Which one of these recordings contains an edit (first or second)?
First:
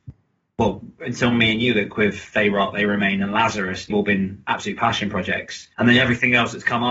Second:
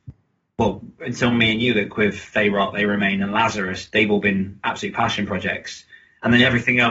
first